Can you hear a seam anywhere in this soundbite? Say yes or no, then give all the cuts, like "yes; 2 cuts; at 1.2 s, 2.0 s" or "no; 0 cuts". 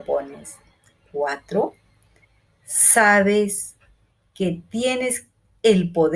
no; 0 cuts